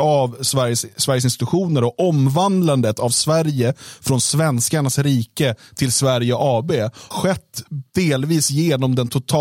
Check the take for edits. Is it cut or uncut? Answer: cut